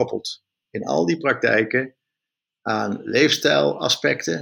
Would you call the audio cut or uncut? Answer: uncut